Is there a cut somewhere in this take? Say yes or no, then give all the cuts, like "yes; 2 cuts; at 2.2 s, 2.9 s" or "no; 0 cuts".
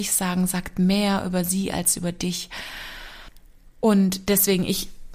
no; 0 cuts